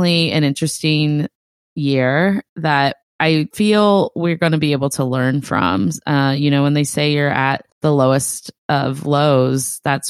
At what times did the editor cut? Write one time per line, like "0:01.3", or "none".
0:07.7

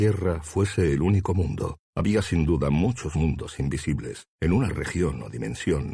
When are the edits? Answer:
0:01.8
0:03.1
0:04.3

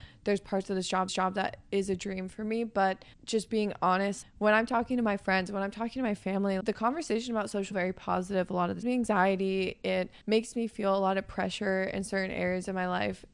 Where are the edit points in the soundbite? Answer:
0:01.1
0:03.1
0:04.2
0:06.6
0:07.7
0:08.8
0:10.2

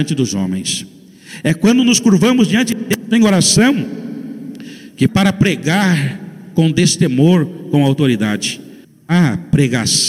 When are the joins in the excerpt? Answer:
0:05.1

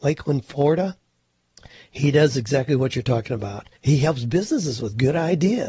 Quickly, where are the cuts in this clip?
0:03.8

